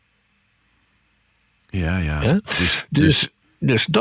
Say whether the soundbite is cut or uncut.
uncut